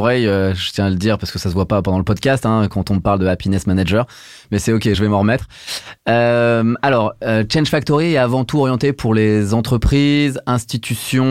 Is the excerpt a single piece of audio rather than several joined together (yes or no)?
no